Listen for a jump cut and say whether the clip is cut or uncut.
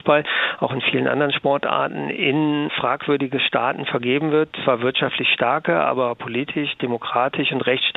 uncut